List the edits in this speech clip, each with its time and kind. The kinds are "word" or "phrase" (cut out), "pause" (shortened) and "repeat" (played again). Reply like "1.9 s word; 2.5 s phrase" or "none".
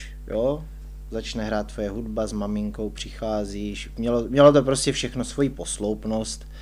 none